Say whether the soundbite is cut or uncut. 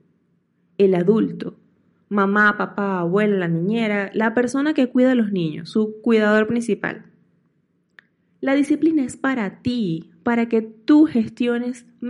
uncut